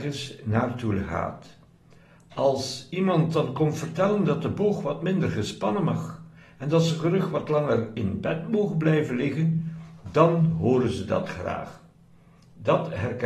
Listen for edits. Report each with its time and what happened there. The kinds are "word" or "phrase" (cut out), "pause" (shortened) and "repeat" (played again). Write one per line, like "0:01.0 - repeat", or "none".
none